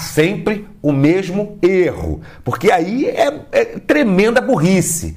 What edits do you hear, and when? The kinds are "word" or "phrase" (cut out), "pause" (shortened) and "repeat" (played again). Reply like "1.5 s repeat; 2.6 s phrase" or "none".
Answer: none